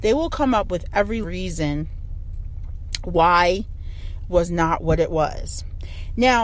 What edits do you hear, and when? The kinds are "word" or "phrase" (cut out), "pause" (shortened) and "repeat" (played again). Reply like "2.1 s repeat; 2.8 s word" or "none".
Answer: 1.2 s word; 4.3 s phrase